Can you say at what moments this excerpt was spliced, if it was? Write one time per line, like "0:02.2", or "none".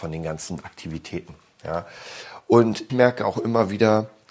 0:02.9

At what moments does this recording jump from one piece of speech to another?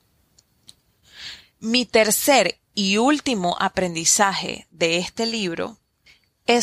none

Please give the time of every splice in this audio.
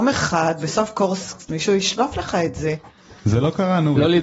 0:01.5

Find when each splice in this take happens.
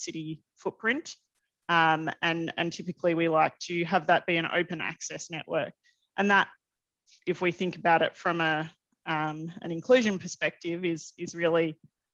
none

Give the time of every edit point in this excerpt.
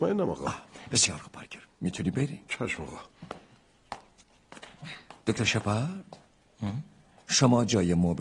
0:02.5
0:05.2

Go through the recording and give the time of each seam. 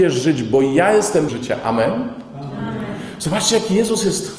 0:01.3

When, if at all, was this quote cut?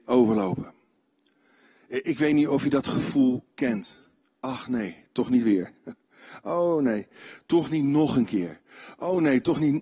none

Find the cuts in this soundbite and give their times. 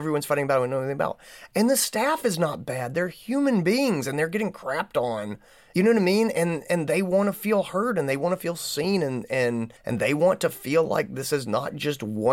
0:09.8

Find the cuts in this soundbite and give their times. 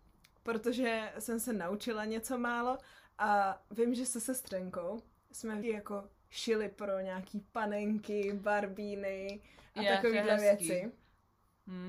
0:05.6

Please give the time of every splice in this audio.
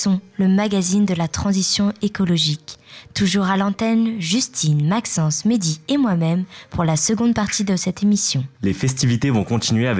0:08.5

